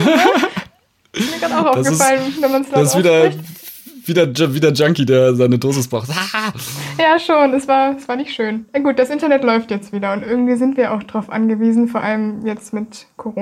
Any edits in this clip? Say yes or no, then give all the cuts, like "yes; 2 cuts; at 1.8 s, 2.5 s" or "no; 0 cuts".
no; 0 cuts